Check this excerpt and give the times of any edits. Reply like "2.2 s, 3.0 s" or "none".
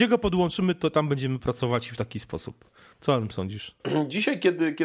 none